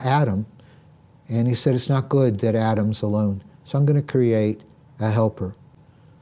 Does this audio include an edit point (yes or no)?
no